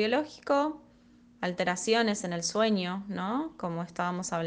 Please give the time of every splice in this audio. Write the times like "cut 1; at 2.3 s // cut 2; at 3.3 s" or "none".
none